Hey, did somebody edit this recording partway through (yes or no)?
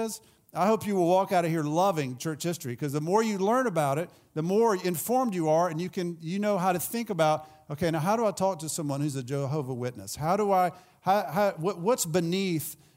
no